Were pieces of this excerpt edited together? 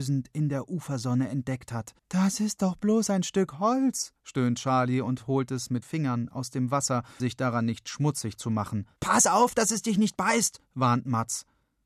yes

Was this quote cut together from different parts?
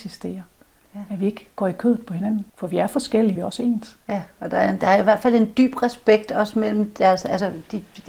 yes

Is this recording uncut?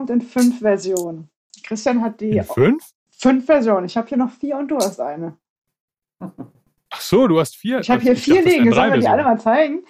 yes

